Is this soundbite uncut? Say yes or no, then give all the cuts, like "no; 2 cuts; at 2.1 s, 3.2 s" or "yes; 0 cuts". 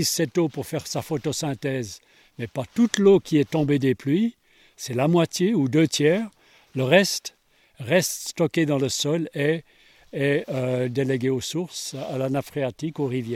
yes; 0 cuts